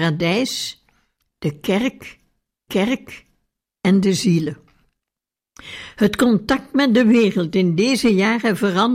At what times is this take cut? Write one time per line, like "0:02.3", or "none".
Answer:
0:02.7

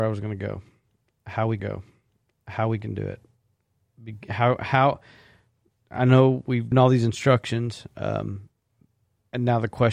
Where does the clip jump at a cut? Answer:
0:01.6
0:06.7

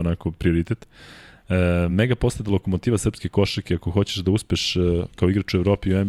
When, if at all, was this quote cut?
none

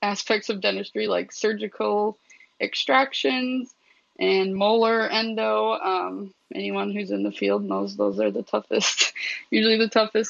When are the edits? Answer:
none

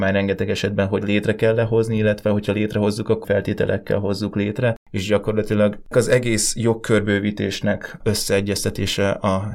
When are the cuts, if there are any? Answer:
0:01.0
0:03.2
0:05.9
0:08.0

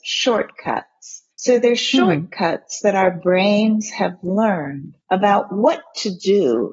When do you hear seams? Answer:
0:01.3
0:05.0

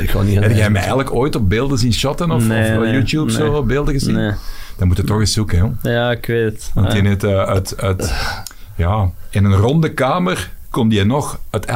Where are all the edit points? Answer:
none

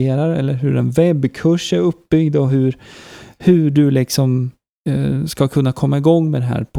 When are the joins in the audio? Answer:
none

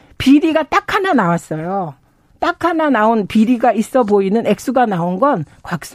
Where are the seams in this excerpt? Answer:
none

